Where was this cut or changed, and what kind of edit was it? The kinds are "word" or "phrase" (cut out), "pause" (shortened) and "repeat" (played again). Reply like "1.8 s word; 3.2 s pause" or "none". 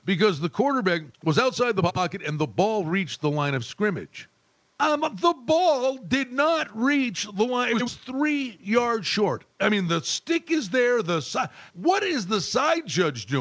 1.1 s pause; 4.4 s pause; 11.7 s pause